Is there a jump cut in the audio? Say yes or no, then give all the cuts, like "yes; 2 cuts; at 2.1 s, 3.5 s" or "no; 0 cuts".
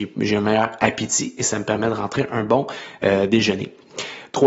no; 0 cuts